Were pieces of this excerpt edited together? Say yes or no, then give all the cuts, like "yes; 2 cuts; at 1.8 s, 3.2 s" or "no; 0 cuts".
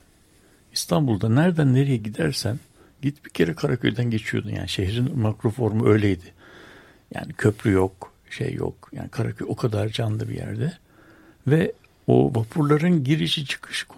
no; 0 cuts